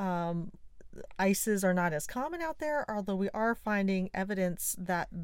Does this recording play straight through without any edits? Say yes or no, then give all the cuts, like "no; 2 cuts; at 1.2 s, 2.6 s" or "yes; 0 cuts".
yes; 0 cuts